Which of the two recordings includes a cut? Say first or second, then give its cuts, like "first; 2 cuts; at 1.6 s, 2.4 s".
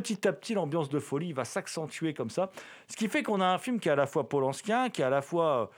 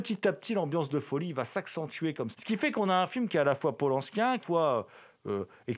second; 2 cuts; at 2.3 s, 4.4 s